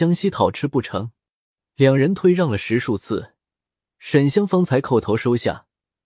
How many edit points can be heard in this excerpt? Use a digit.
0